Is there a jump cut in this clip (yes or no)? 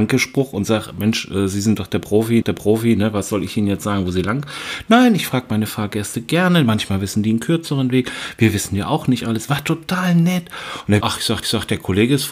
yes